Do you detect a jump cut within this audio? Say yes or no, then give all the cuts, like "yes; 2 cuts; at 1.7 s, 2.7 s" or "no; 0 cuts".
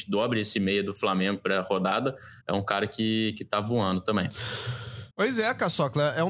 yes; 2 cuts; at 2.4 s, 5.1 s